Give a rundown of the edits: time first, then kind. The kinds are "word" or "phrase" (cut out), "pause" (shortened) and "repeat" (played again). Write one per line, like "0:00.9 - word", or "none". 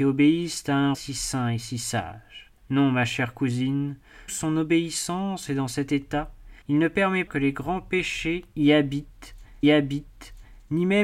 0:00.9 - word
0:02.6 - pause
0:04.3 - word
0:06.6 - pause
0:07.3 - word
0:09.6 - repeat